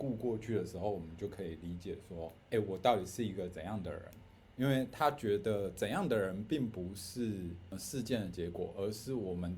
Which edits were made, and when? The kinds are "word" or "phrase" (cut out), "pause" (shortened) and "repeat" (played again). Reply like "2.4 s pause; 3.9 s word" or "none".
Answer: 2.4 s pause